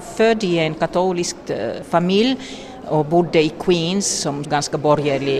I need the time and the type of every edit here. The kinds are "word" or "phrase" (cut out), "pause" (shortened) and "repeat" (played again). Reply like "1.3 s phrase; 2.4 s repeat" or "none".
4.4 s phrase